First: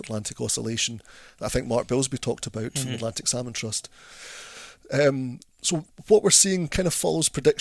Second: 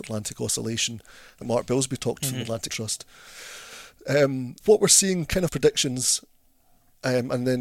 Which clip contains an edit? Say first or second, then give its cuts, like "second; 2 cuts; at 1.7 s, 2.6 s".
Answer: second; 5 cuts; at 1.4 s, 2.2 s, 2.7 s, 4.6 s, 5.5 s